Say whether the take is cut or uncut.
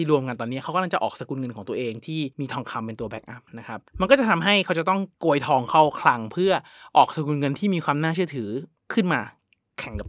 cut